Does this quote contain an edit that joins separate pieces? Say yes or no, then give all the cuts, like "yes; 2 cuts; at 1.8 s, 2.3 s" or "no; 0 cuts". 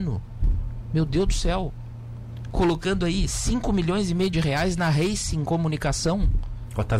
no; 0 cuts